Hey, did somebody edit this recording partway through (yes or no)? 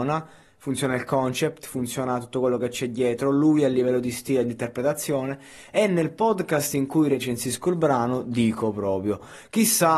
no